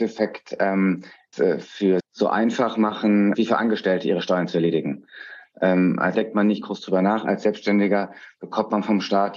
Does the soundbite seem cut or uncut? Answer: cut